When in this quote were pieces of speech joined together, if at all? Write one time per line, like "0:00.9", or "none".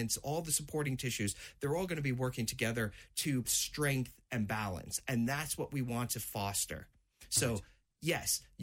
0:03.4